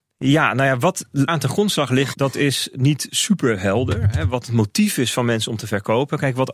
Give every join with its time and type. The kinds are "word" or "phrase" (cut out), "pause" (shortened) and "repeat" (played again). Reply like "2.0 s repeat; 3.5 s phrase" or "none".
1.3 s word; 2.1 s word

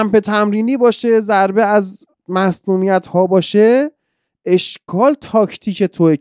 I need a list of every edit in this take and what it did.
none

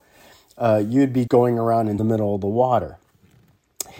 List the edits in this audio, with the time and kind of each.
1.3 s word; 2.0 s phrase

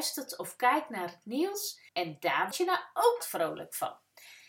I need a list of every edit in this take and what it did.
1.9 s pause; 2.5 s word; 3.2 s phrase

